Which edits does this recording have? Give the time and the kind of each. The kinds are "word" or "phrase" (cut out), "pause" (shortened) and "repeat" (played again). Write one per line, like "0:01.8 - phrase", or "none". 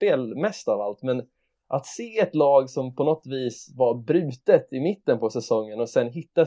none